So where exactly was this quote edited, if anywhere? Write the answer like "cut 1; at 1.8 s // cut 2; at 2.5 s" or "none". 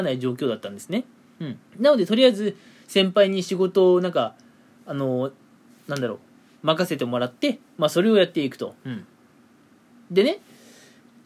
cut 1; at 1.7 s